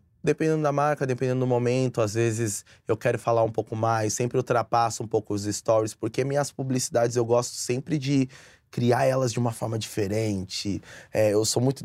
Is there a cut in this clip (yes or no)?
no